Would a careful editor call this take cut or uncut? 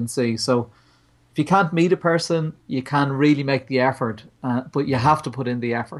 uncut